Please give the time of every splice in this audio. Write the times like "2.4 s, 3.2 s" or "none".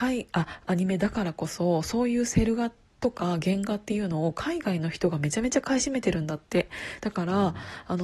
none